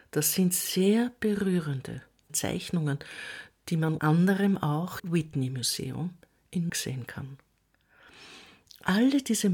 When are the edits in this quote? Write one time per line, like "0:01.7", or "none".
0:02.3
0:04.0
0:05.0
0:06.7